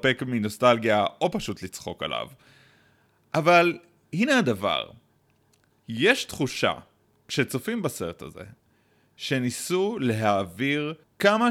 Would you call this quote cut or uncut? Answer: uncut